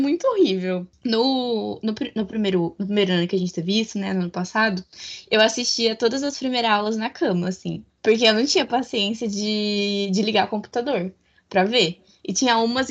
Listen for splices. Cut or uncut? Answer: uncut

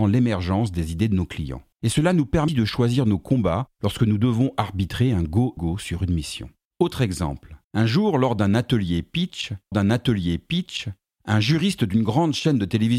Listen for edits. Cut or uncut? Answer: cut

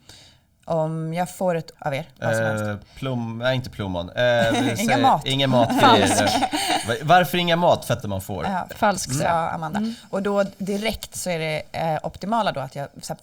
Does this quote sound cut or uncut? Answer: cut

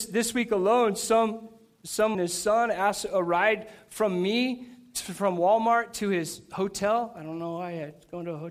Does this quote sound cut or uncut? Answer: cut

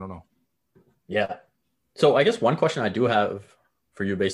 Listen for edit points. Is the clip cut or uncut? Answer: uncut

